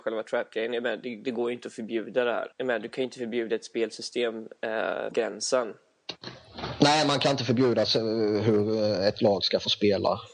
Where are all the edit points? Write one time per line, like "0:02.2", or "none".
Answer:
0:02.5
0:05.1